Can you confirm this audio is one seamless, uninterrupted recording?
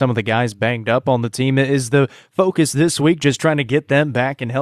yes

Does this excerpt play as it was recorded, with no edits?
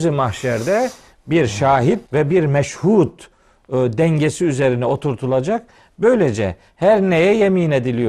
no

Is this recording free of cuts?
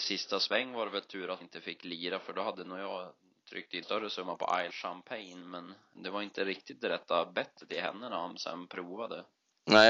no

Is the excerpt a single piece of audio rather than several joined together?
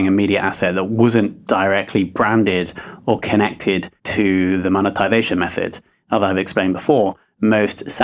no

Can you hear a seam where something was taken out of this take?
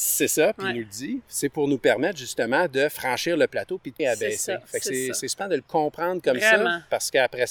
yes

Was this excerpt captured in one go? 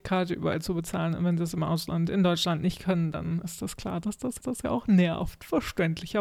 no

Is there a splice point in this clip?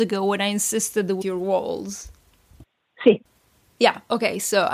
yes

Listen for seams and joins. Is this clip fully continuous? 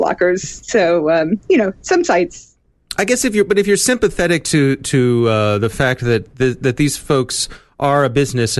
yes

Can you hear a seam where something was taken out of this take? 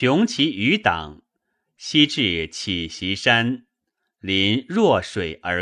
no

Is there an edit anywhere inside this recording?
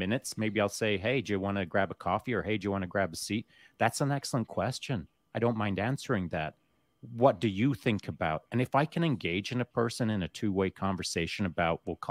no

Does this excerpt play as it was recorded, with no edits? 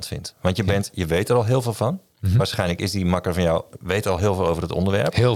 yes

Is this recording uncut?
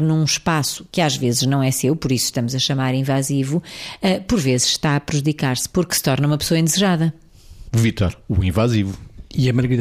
yes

